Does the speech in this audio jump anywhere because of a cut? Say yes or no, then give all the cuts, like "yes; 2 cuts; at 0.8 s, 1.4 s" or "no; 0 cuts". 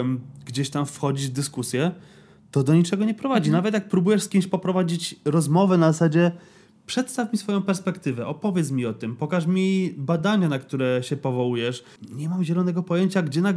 no; 0 cuts